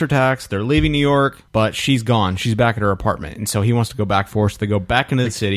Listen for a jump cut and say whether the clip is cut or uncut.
cut